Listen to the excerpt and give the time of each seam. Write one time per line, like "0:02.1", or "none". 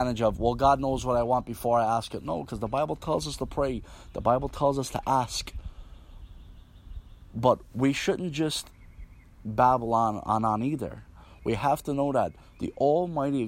none